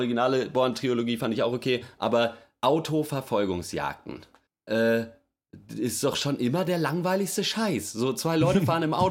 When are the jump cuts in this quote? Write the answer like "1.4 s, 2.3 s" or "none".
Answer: 4.5 s